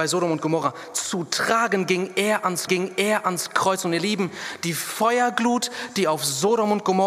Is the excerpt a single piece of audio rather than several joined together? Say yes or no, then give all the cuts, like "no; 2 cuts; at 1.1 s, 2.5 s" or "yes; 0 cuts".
no; 1 cut; at 2.7 s